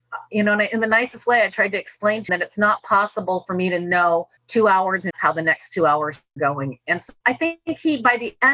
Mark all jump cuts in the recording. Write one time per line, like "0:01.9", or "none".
0:02.3
0:04.4
0:05.1
0:06.4
0:07.2